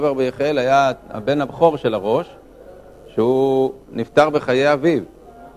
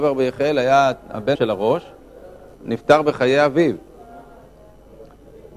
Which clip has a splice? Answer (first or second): second